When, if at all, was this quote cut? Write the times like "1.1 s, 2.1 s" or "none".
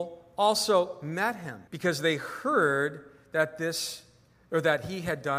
1.7 s